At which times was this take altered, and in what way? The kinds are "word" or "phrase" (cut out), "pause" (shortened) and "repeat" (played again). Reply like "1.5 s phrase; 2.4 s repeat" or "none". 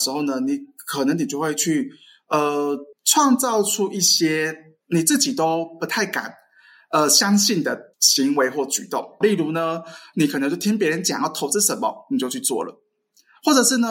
2.9 s pause; 4.8 s pause; 7.9 s pause; 9.2 s word